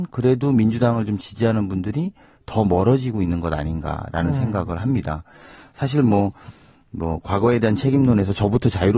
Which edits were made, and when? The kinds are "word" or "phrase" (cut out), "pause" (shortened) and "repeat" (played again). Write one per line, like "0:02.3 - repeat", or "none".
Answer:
none